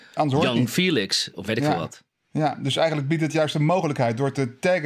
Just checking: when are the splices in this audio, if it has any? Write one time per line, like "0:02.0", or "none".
none